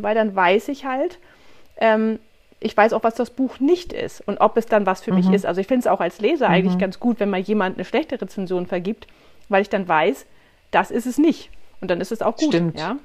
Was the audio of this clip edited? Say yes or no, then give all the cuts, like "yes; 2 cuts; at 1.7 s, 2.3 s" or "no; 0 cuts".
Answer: no; 0 cuts